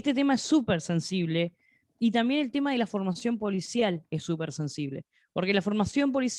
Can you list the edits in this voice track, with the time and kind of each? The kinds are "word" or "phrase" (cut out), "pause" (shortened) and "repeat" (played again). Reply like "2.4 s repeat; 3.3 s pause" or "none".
none